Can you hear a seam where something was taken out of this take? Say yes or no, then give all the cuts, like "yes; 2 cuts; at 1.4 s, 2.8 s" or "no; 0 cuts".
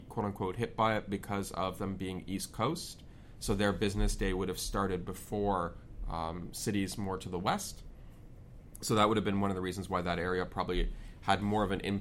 no; 0 cuts